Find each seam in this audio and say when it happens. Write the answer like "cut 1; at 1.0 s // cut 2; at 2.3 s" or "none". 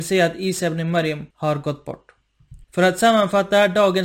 cut 1; at 1.3 s // cut 2; at 2.6 s